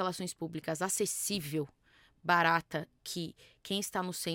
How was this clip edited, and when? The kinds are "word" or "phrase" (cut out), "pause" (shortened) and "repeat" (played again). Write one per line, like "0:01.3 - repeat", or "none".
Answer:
0:03.0 - word